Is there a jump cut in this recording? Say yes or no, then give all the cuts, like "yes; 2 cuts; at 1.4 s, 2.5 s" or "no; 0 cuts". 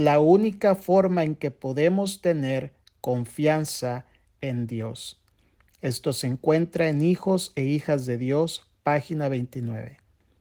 no; 0 cuts